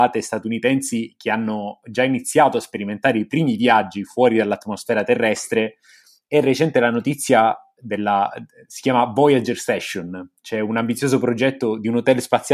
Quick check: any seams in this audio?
no; 0 cuts

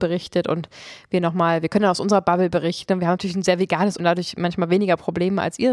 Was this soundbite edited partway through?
yes; 1 cut; at 4.0 s

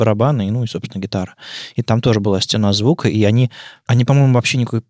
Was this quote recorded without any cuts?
yes; 0 cuts

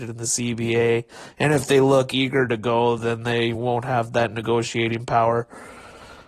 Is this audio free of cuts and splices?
yes; 0 cuts

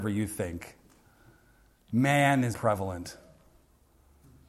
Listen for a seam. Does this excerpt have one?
yes; 1 cut; at 2.5 s

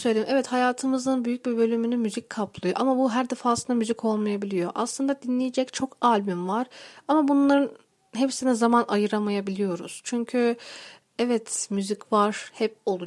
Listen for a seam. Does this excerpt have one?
no; 0 cuts

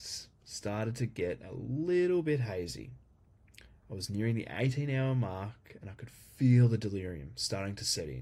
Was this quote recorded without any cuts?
yes; 0 cuts

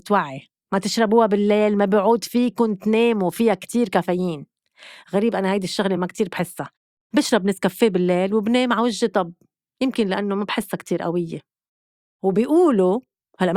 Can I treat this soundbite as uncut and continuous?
yes; 0 cuts

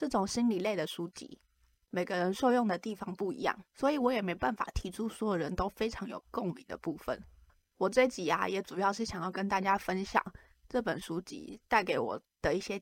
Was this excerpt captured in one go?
no; 2 cuts; at 3.7 s, 7.5 s

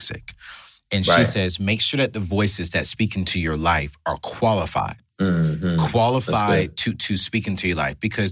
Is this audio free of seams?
yes; 0 cuts

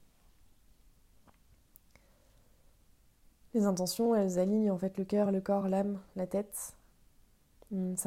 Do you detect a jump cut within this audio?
no; 0 cuts

